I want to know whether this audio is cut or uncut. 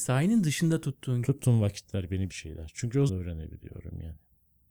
cut